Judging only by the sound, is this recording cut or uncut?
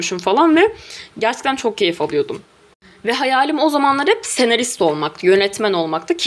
uncut